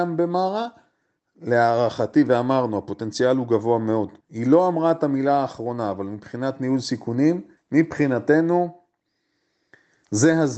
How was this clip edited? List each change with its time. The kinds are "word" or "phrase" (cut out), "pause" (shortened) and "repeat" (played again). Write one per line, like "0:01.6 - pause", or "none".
0:04.2 - pause
0:07.6 - pause